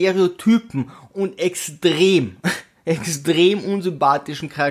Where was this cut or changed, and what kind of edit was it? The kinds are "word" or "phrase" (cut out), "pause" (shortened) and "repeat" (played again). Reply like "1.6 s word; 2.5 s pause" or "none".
none